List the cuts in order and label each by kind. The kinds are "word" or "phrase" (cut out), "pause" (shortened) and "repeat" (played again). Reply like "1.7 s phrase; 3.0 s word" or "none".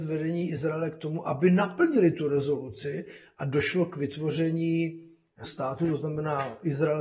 5.4 s word